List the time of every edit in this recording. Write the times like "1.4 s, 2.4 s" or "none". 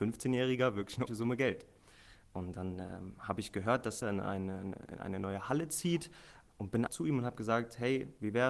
1.1 s, 4.0 s, 6.4 s, 6.9 s